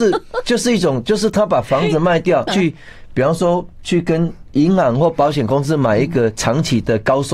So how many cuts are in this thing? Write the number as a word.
one